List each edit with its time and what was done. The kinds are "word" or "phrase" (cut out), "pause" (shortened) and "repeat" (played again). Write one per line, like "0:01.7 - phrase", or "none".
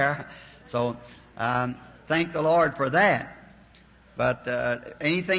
none